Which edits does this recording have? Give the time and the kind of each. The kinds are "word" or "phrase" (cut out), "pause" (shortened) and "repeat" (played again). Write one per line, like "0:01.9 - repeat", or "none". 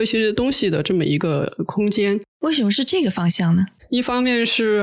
0:02.3 - pause